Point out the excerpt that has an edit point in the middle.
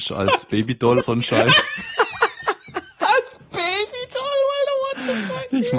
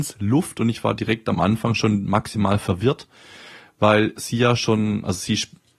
first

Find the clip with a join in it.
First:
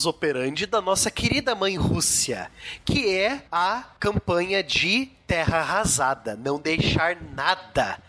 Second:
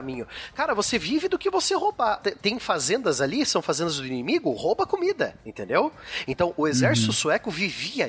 second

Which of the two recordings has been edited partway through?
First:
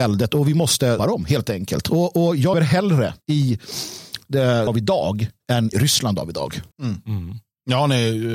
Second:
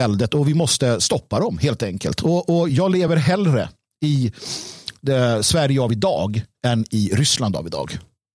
first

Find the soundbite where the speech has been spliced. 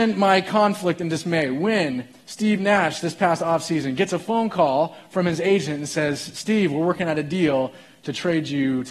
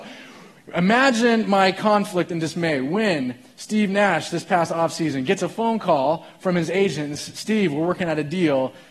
second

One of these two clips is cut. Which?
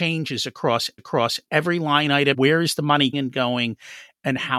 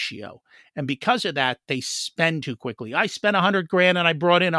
first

